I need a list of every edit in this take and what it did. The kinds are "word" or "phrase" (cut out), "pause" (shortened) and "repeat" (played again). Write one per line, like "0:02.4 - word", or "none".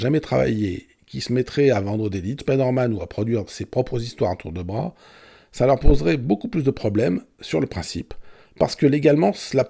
0:02.4 - word